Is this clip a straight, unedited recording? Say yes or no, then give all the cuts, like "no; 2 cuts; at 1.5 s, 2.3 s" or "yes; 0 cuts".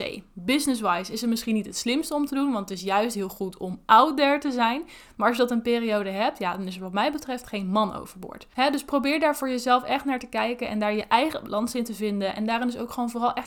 no; 1 cut; at 8.5 s